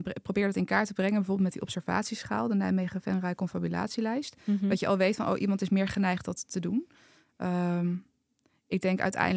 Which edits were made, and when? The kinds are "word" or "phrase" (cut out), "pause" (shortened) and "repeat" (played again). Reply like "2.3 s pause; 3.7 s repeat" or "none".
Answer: none